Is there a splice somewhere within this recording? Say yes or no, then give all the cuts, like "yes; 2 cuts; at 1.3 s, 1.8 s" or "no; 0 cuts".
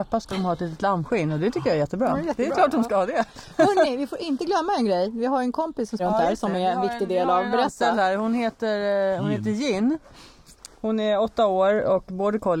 yes; 1 cut; at 6.0 s